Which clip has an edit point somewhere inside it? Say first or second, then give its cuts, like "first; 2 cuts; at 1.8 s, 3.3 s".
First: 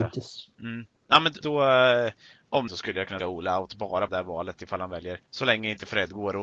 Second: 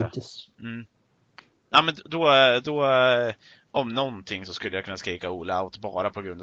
first; 6 cuts; at 1.0 s, 1.4 s, 2.7 s, 3.2 s, 4.1 s, 5.3 s